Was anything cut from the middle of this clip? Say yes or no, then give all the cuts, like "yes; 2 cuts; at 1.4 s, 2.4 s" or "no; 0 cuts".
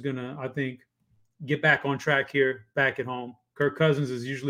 no; 0 cuts